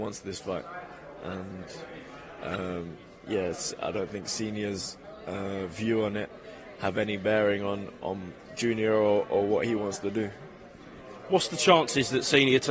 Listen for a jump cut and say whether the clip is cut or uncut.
uncut